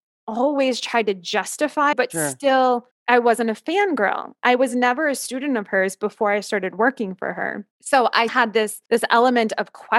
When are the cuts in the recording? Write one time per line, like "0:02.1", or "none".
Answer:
0:01.9
0:02.9
0:07.7
0:08.3
0:08.9